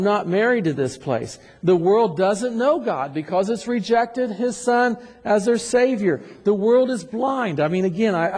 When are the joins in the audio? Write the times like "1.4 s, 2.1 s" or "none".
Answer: none